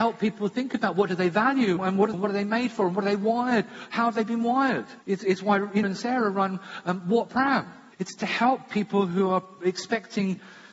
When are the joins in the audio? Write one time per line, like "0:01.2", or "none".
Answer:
0:01.8
0:02.1
0:05.0
0:05.8
0:07.9